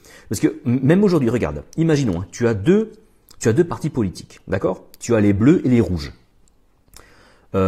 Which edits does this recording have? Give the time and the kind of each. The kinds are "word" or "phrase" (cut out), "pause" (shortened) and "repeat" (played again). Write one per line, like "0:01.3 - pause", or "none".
none